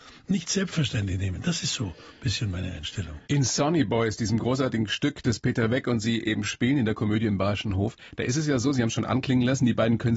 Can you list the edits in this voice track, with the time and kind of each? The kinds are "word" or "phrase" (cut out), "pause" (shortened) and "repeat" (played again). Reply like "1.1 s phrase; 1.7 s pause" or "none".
3.2 s pause